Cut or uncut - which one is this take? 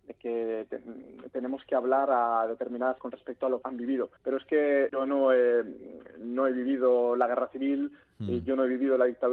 cut